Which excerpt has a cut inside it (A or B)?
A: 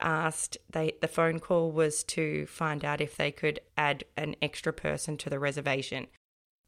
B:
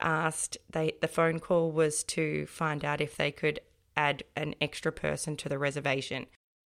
A